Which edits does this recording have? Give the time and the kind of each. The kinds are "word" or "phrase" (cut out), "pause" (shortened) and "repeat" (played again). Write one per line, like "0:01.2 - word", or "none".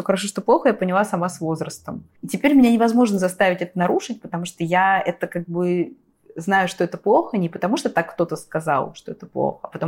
0:02.2 - pause